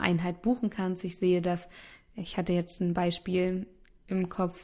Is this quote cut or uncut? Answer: uncut